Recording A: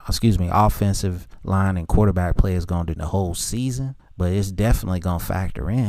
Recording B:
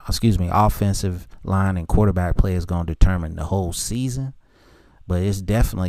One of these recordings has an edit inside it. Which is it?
A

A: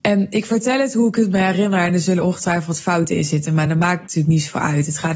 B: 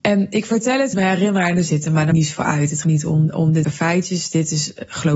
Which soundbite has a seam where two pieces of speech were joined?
B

